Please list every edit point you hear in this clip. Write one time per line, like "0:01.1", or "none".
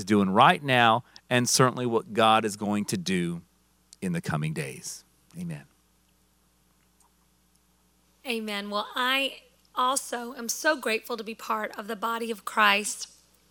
none